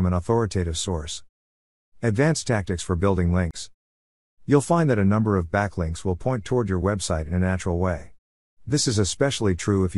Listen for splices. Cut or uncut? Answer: uncut